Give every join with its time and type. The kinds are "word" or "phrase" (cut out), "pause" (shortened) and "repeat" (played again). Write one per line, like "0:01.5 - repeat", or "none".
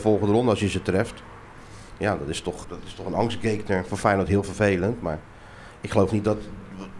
0:02.6 - word